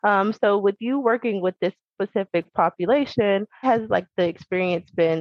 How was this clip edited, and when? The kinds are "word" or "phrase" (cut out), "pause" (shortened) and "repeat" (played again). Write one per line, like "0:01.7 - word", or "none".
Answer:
0:03.6 - word